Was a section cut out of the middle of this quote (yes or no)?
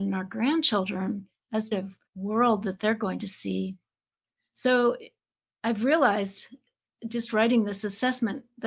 yes